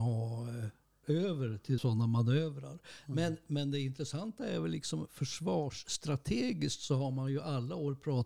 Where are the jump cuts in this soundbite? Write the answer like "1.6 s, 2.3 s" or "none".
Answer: 1.0 s, 1.8 s